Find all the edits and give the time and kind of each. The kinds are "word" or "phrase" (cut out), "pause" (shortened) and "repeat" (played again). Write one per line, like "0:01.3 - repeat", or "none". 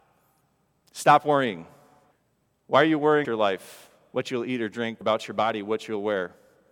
0:02.1 - pause
0:03.2 - word
0:05.0 - word